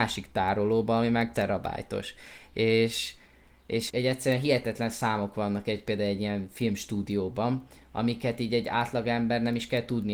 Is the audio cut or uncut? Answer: cut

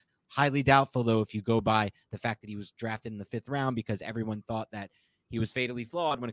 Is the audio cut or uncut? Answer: uncut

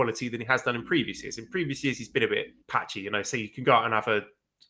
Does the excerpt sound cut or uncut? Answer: cut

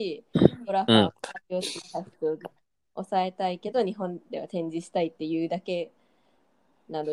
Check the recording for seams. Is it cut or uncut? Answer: cut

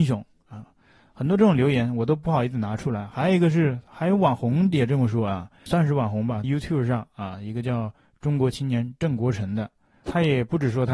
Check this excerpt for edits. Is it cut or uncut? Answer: cut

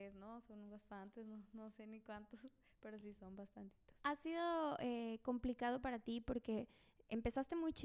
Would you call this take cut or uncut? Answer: uncut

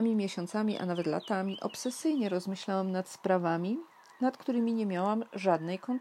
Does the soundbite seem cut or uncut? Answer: uncut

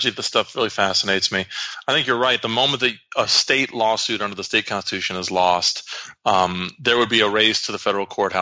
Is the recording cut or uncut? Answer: uncut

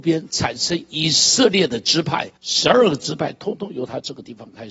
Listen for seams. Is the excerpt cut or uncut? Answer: cut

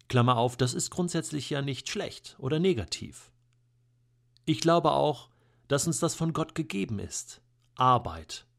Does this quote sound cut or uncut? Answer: uncut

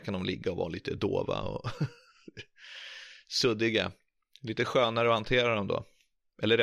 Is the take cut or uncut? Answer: uncut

